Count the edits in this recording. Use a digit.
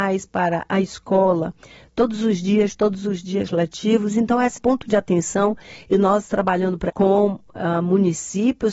3